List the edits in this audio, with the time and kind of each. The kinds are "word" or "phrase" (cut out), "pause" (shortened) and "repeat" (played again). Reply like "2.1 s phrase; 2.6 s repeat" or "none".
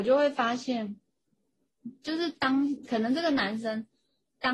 1.8 s word